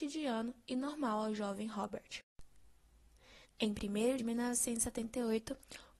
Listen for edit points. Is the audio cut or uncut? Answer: cut